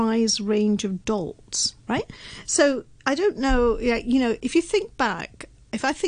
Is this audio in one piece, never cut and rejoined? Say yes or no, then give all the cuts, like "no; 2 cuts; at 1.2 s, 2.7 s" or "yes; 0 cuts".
yes; 0 cuts